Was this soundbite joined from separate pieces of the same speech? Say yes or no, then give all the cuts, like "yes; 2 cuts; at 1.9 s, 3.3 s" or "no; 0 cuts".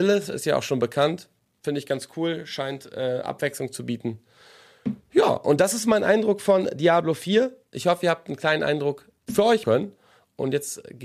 yes; 3 cuts; at 7.7 s, 9.2 s, 9.6 s